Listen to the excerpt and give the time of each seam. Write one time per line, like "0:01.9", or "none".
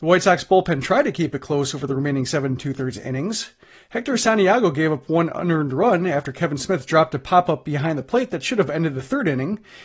none